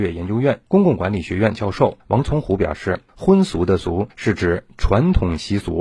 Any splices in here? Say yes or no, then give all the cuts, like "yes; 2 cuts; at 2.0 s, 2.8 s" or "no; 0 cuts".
yes; 2 cuts; at 2.0 s, 4.1 s